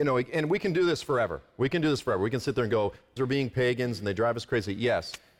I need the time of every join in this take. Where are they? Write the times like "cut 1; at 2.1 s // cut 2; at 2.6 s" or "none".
cut 1; at 3.2 s